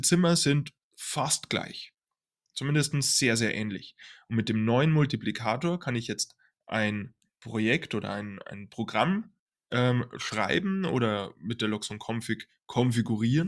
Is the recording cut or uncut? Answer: uncut